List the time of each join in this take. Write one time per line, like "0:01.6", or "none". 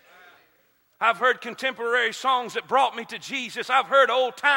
none

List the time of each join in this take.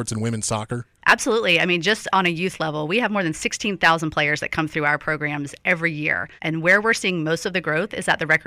0:06.4

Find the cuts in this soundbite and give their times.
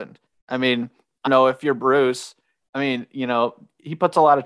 0:01.3

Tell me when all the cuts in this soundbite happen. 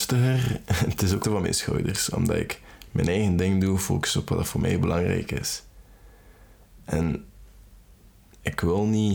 0:01.2

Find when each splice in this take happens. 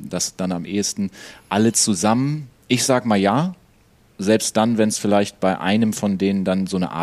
none

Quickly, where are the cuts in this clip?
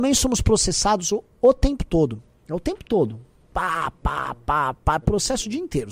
none

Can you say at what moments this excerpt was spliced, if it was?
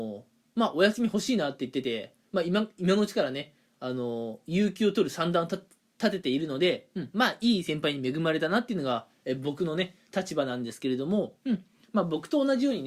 none

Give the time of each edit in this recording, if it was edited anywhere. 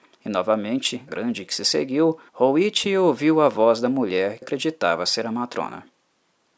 0:01.1
0:01.5
0:02.3
0:04.4

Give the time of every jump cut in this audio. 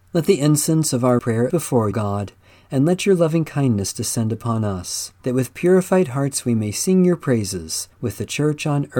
0:01.2
0:01.5
0:01.9
0:05.2
0:07.9

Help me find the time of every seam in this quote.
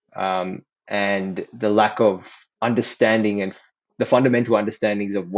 none

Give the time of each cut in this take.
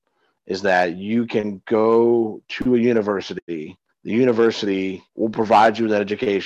0:03.9
0:05.1

